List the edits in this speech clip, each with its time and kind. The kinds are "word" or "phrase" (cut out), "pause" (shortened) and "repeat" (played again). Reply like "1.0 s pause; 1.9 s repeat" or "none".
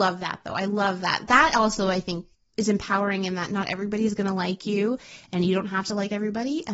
2.3 s pause